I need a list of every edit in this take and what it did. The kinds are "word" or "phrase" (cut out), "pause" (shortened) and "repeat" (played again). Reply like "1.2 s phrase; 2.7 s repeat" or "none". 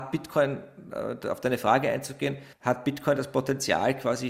2.5 s pause